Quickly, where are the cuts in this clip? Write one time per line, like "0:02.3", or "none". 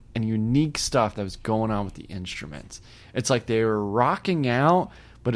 none